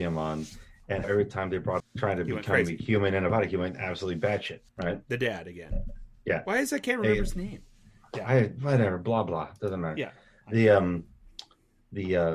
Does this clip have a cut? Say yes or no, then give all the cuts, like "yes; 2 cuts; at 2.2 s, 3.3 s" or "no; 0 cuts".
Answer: yes; 3 cuts; at 1.0 s, 1.8 s, 4.7 s